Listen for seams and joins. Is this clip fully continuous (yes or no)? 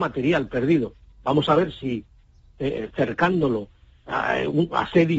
yes